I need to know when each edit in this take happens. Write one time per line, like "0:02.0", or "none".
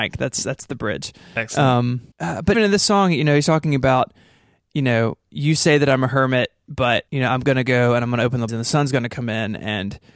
0:02.1
0:02.5
0:07.1
0:08.5